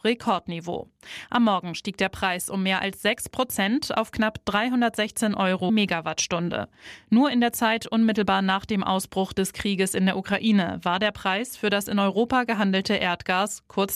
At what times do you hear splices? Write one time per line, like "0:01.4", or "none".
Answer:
0:05.7